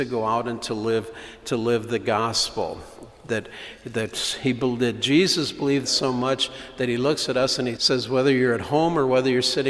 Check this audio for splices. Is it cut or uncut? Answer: cut